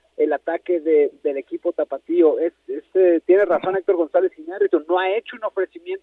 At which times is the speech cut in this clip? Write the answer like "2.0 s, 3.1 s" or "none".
none